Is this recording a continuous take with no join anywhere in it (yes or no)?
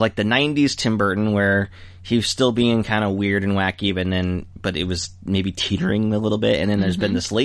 yes